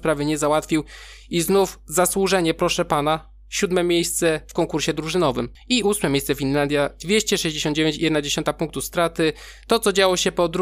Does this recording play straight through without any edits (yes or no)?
yes